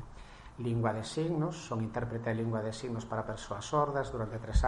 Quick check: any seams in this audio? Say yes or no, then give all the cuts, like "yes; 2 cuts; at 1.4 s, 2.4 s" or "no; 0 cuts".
no; 0 cuts